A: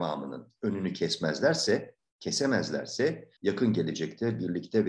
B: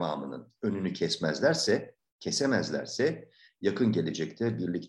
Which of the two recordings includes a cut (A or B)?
A